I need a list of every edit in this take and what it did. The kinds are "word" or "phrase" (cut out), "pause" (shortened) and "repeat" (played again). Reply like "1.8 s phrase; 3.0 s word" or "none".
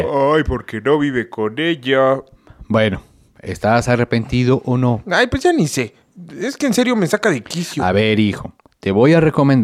none